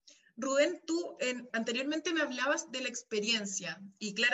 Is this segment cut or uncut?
cut